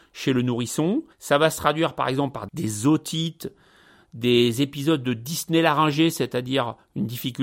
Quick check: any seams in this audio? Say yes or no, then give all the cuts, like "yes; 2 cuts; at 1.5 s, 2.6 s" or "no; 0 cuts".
yes; 2 cuts; at 1.1 s, 2.5 s